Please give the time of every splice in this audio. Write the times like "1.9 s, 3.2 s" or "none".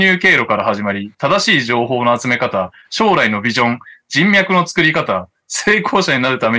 none